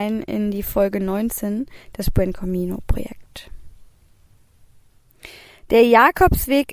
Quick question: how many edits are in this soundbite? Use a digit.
0